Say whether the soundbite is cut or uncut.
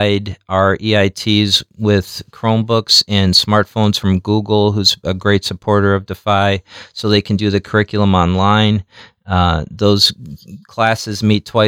uncut